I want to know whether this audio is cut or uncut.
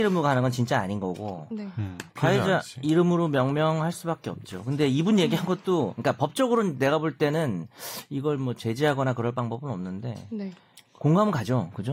cut